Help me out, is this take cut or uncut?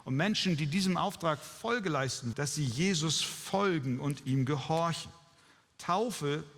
cut